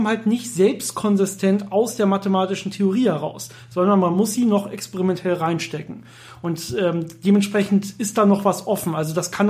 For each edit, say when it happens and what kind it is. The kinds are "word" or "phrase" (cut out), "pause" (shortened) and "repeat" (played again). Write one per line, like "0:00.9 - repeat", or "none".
none

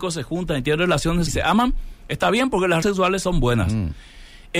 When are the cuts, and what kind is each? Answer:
0:01.3 - word
0:02.8 - word

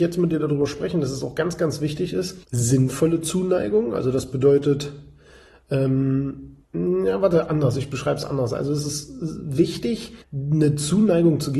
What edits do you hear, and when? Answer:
0:02.4 - pause
0:06.6 - pause
0:10.2 - pause

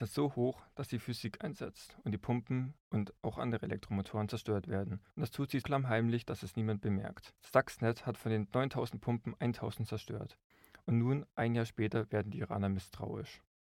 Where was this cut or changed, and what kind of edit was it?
0:02.8 - pause
0:05.1 - pause
0:05.6 - word
0:07.4 - pause

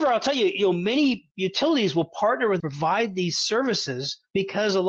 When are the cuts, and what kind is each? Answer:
0:02.6 - phrase

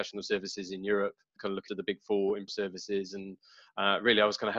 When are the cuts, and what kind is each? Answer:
0:01.4 - word
0:01.7 - word
0:02.5 - word

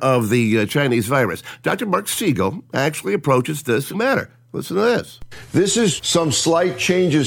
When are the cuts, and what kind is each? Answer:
0:03.9 - phrase
0:06.0 - word

